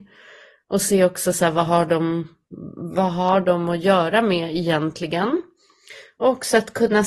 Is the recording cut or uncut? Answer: uncut